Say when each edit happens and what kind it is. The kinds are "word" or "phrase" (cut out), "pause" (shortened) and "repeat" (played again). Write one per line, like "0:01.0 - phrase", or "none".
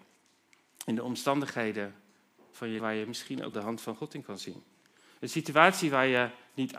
0:02.8 - word
0:03.5 - word